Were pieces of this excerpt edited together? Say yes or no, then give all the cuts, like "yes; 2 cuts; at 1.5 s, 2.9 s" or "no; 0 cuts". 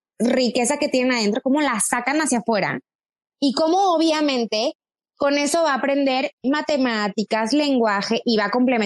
no; 0 cuts